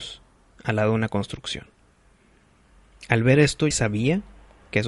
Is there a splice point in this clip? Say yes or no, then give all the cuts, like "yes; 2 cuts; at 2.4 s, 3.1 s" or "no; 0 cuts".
yes; 1 cut; at 3.7 s